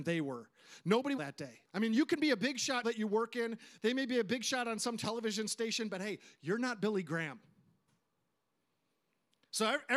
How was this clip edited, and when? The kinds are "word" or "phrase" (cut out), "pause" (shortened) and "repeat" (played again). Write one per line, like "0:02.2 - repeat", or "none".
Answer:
0:01.2 - phrase
0:01.6 - pause
0:02.8 - phrase